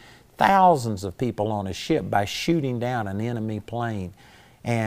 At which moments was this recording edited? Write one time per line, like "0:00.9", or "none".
none